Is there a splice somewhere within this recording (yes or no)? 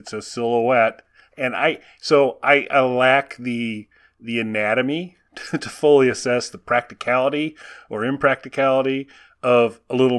no